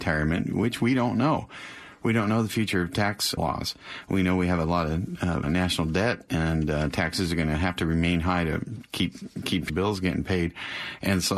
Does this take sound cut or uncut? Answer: cut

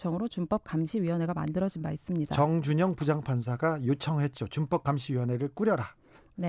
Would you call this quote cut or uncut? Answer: uncut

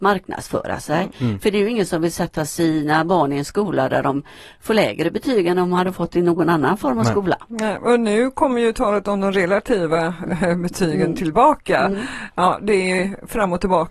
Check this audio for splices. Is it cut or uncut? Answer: uncut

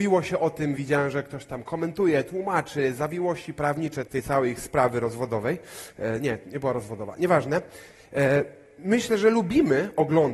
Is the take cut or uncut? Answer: cut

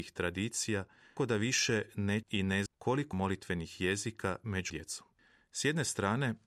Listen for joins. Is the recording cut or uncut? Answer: cut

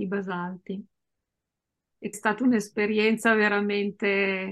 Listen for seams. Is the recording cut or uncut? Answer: cut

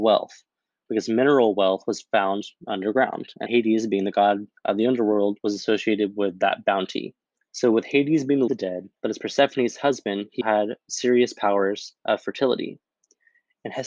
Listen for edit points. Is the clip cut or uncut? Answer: cut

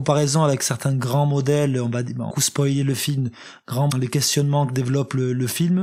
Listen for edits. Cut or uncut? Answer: cut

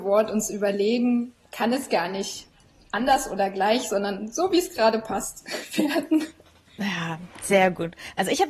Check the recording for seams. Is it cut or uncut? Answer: uncut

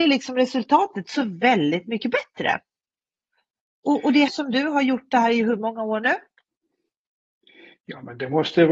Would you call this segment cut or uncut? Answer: cut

